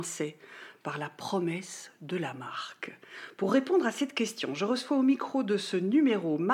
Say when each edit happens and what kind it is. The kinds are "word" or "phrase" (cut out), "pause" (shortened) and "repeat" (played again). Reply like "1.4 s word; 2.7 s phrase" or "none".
none